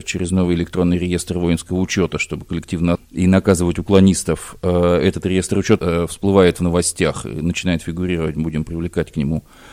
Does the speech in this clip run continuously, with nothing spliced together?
no; 2 cuts; at 2.9 s, 5.8 s

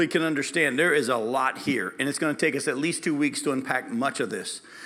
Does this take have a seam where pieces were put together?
no; 0 cuts

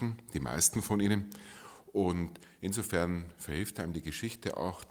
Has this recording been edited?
no; 0 cuts

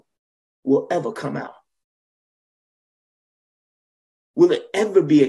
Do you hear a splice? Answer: no; 0 cuts

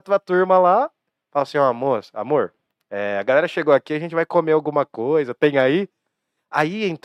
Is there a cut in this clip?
no; 0 cuts

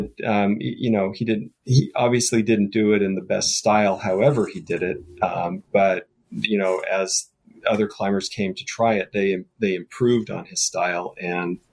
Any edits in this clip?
no; 0 cuts

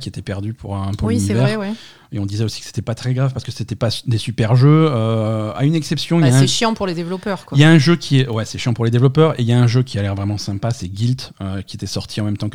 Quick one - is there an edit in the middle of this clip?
no; 0 cuts

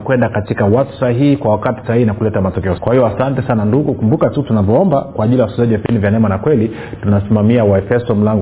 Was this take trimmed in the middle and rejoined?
yes; 1 cut; at 2.8 s

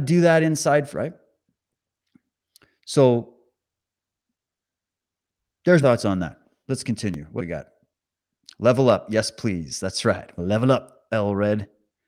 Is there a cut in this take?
yes; 4 cuts; at 0.9 s, 5.8 s, 7.4 s, 10.4 s

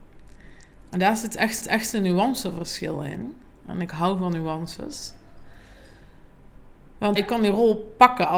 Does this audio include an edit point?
yes; 2 cuts; at 1.6 s, 7.2 s

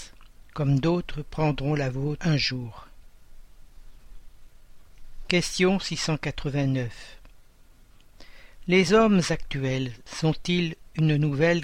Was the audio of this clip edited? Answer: no; 0 cuts

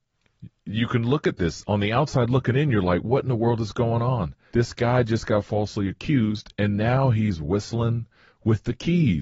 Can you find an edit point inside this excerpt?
no; 0 cuts

